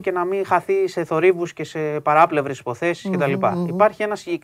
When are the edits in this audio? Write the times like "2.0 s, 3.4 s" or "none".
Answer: none